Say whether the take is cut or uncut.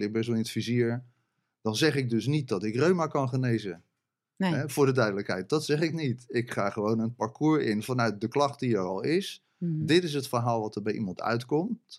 uncut